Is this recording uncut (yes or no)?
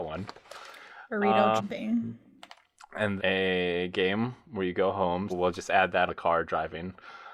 no